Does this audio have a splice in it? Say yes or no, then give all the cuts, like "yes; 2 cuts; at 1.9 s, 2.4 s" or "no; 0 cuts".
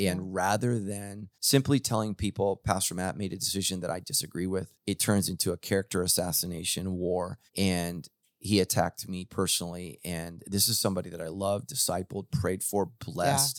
yes; 3 cuts; at 1.3 s, 4.7 s, 7.5 s